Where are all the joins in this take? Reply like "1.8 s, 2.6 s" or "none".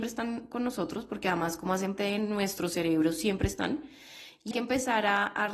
2.0 s, 4.5 s